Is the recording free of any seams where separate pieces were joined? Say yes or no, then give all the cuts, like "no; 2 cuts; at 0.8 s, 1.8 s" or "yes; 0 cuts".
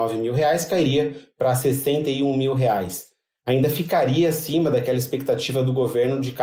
yes; 0 cuts